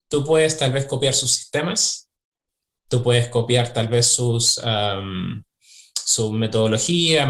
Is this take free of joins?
yes; 0 cuts

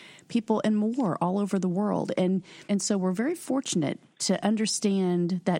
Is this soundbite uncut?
no; 1 cut; at 2.7 s

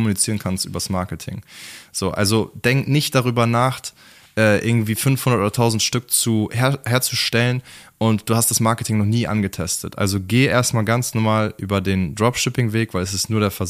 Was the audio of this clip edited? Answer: no; 0 cuts

